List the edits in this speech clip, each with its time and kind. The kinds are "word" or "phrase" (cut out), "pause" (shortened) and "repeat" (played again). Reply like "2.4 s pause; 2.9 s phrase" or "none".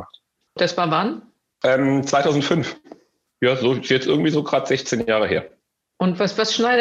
none